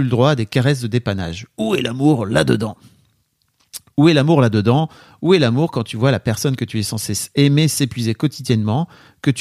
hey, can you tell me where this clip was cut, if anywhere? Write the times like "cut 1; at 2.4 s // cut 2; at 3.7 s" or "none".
none